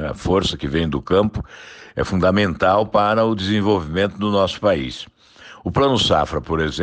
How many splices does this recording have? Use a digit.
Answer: 0